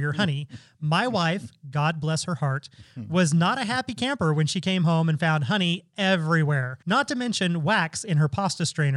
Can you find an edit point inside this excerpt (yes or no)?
yes